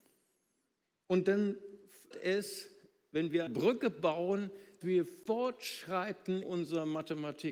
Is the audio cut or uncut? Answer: cut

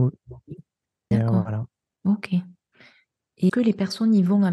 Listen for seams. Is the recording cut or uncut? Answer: cut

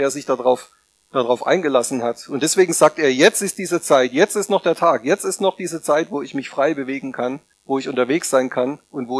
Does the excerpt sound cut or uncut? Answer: cut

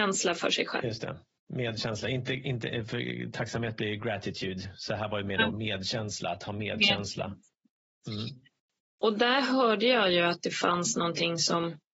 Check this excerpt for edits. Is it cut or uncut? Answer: uncut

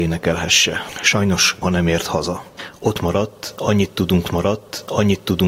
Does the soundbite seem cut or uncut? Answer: cut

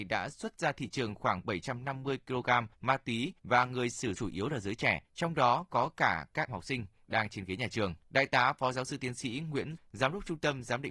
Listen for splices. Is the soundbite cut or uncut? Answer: cut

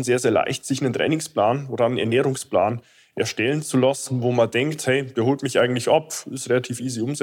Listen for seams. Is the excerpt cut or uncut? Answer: uncut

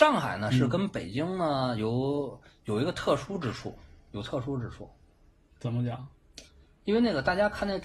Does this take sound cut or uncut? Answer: uncut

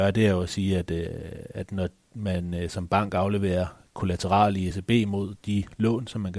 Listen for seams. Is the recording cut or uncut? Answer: uncut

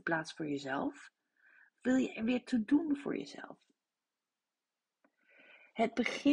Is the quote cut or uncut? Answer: uncut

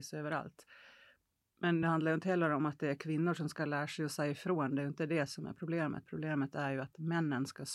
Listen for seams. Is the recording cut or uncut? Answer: uncut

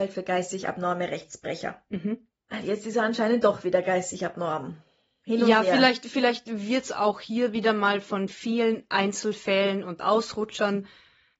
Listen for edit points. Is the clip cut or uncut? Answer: uncut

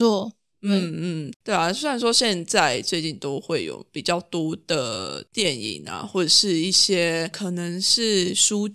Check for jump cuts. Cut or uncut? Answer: uncut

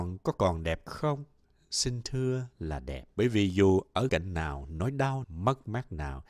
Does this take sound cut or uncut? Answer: cut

